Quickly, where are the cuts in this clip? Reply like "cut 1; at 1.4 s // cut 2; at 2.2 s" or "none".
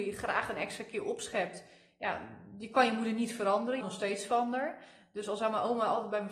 cut 1; at 3.8 s